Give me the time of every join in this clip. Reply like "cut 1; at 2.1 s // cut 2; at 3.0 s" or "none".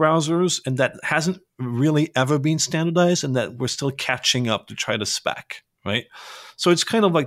none